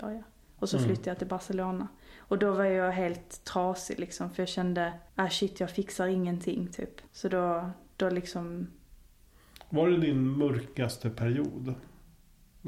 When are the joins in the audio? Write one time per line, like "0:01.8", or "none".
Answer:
0:05.1
0:07.1